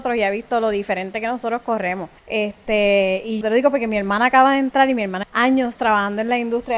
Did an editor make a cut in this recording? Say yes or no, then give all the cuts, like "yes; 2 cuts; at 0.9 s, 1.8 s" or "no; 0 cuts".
yes; 3 cuts; at 2.2 s, 3.4 s, 5.2 s